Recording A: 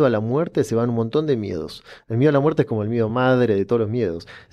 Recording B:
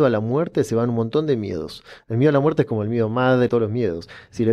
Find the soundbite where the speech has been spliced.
B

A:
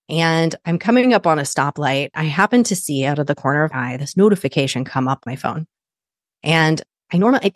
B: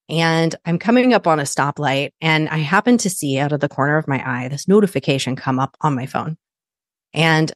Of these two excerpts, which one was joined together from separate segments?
A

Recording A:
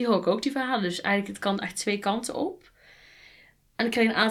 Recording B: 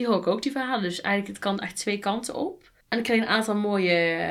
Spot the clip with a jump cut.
B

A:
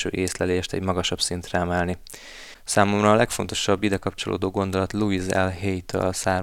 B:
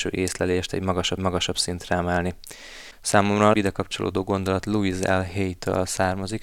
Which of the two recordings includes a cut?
B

